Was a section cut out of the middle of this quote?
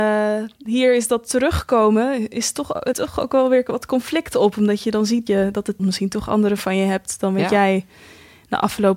yes; 4 cuts; at 2.9 s, 5.3 s, 5.8 s, 6.6 s

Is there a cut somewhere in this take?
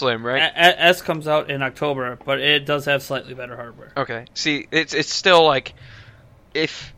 no; 0 cuts

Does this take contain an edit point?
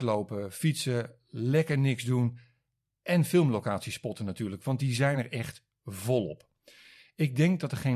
no; 0 cuts

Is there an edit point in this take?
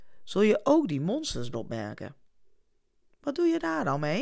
yes; 1 cut; at 1.5 s

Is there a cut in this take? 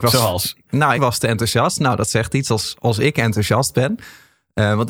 yes; 1 cut; at 0.9 s

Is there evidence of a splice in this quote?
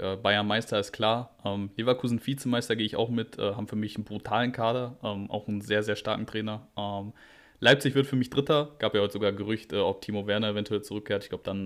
no; 0 cuts

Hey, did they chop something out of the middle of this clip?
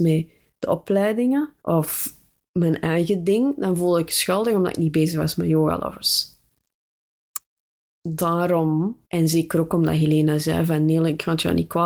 yes; 2 cuts; at 1.6 s, 9.0 s

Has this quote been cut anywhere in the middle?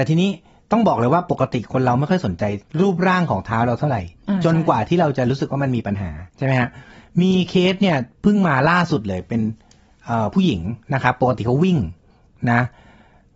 yes; 2 cuts; at 2.7 s, 6.3 s

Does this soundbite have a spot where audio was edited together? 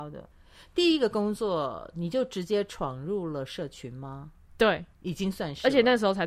yes; 1 cut; at 4.9 s

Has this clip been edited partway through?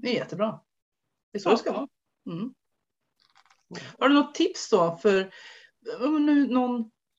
no; 0 cuts

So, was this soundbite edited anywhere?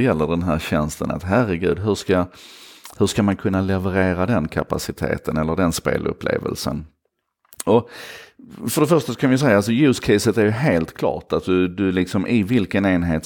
no; 0 cuts

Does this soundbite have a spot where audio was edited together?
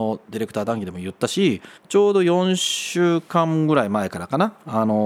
yes; 1 cut; at 1.8 s

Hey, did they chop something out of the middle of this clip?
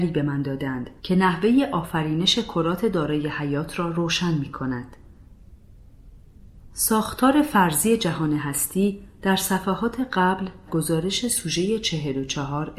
yes; 2 cuts; at 1.0 s, 10.7 s

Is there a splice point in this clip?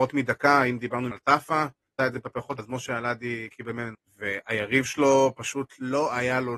yes; 5 cuts; at 1.1 s, 2.0 s, 2.6 s, 3.5 s, 3.9 s

